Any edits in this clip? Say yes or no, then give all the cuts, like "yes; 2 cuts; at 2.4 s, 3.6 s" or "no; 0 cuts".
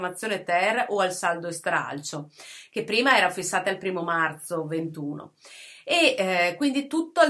no; 0 cuts